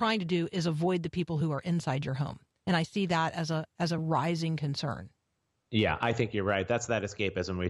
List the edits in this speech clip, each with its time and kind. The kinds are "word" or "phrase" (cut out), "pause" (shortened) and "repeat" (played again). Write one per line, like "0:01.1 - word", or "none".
none